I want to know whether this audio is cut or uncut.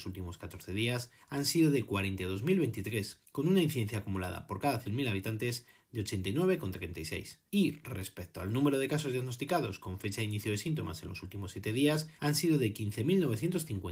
cut